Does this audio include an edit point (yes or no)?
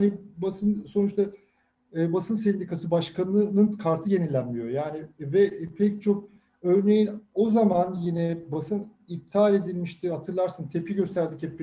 no